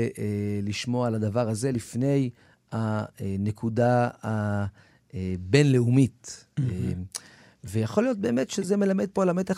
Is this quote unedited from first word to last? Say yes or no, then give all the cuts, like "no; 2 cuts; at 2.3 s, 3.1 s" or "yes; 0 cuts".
yes; 0 cuts